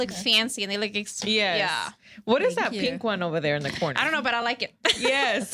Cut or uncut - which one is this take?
uncut